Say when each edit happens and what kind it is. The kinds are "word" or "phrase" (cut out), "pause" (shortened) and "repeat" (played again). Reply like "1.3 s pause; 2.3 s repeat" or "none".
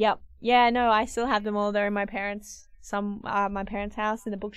2.7 s pause